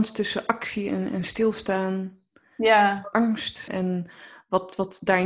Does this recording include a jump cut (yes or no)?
yes